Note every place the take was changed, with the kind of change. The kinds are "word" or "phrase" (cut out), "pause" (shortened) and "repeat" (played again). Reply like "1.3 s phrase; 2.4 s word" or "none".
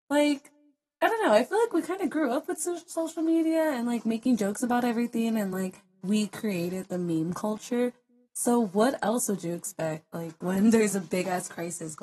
none